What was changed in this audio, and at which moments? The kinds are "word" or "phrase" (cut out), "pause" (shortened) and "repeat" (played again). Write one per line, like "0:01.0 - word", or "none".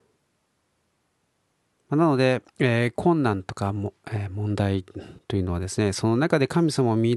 0:02.5 - pause
0:05.2 - pause